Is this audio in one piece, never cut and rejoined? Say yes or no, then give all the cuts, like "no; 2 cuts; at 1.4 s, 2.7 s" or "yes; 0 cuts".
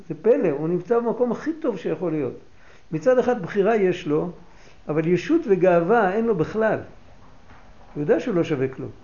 yes; 0 cuts